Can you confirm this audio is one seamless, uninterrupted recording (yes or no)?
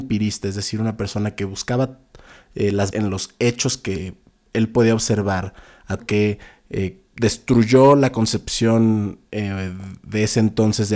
no